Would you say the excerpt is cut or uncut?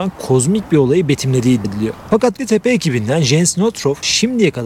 cut